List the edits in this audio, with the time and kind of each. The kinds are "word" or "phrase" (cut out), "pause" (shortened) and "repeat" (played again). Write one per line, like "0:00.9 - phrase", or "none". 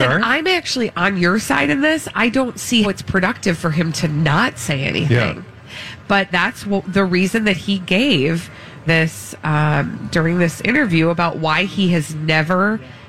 0:02.8 - word
0:06.3 - word
0:08.9 - word